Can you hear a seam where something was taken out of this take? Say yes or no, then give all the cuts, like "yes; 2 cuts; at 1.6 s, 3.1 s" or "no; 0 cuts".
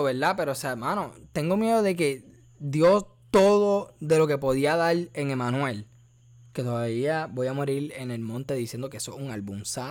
no; 0 cuts